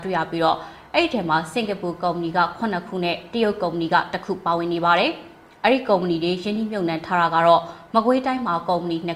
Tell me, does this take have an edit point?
no; 0 cuts

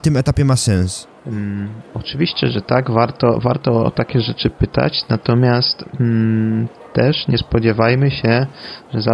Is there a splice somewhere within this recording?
yes; 1 cut; at 1.2 s

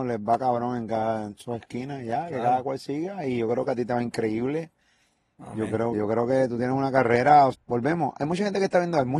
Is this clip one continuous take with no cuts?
no; 2 cuts; at 5.9 s, 7.5 s

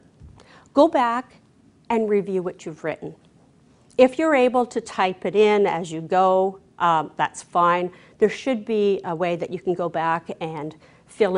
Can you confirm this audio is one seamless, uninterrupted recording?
yes; 0 cuts

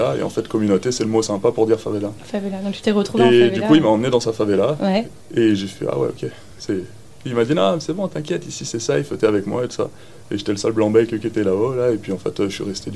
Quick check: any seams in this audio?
no; 0 cuts

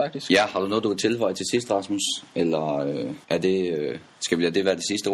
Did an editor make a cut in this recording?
yes; 1 cut; at 3.2 s

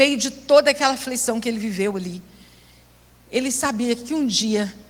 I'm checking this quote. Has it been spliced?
no; 0 cuts

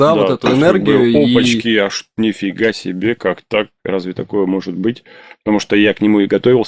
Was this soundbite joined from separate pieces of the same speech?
no; 0 cuts

